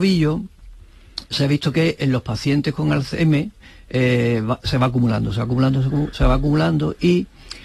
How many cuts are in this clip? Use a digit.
0